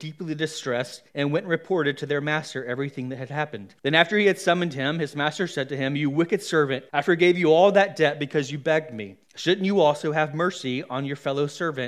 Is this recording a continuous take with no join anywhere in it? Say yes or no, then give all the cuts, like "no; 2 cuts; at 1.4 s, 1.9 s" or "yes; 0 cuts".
no; 4 cuts; at 1.1 s, 3.8 s, 6.9 s, 9.2 s